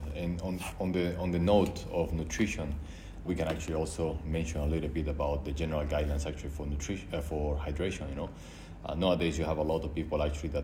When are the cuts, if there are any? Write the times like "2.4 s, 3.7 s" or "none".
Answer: 3.3 s